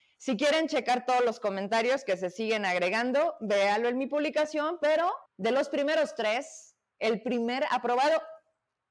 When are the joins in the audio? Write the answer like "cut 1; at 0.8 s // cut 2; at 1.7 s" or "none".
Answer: cut 1; at 5.3 s

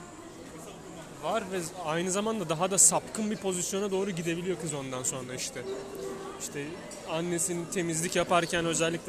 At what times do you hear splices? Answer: none

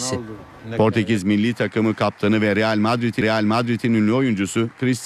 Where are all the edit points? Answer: cut 1; at 3.2 s

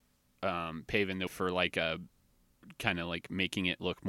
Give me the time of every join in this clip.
cut 1; at 1.3 s

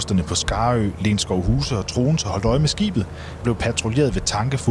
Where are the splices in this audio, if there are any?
cut 1; at 3.4 s

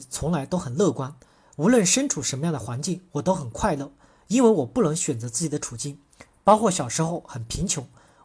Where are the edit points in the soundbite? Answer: none

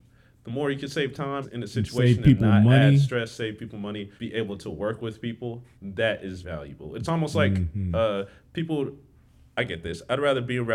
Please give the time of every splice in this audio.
cut 1; at 1.4 s // cut 2; at 4.2 s // cut 3; at 5.7 s // cut 4; at 6.4 s

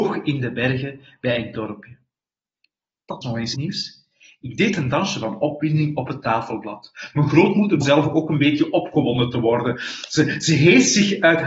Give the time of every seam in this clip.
cut 1; at 1.5 s // cut 2; at 3.2 s // cut 3; at 3.5 s // cut 4; at 7.8 s

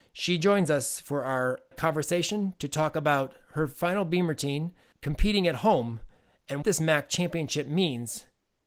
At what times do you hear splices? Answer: cut 1; at 1.7 s // cut 2; at 4.9 s // cut 3; at 6.6 s

